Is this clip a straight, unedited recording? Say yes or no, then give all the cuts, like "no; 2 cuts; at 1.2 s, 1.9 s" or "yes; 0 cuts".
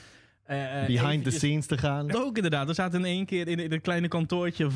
no; 1 cut; at 2.1 s